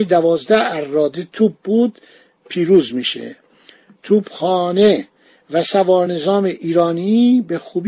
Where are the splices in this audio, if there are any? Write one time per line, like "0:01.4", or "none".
none